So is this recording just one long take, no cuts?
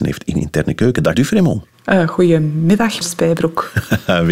no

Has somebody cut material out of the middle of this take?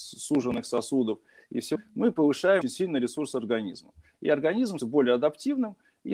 yes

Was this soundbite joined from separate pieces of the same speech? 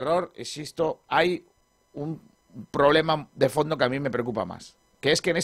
no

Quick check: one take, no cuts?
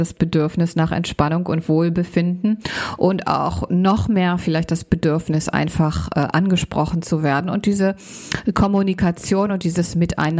yes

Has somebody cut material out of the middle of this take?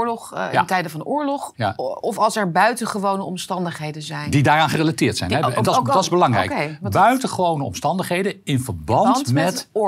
no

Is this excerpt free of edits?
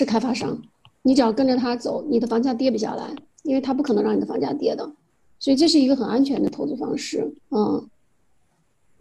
no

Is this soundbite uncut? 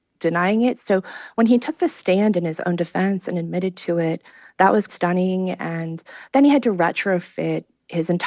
no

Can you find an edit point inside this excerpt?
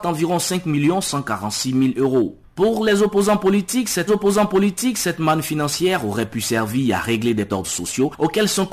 yes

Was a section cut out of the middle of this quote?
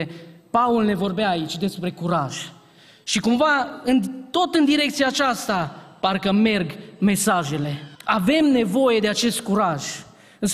yes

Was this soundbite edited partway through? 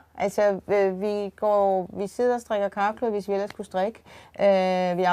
no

